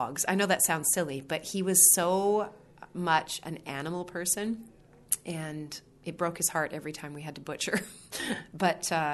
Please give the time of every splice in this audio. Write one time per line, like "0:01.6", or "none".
none